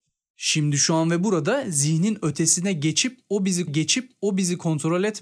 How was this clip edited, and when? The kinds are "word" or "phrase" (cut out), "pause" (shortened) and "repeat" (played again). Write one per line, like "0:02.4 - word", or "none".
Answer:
0:03.7 - repeat